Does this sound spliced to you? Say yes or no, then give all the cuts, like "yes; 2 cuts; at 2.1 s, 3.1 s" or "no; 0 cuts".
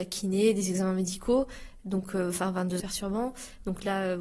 yes; 1 cut; at 2.8 s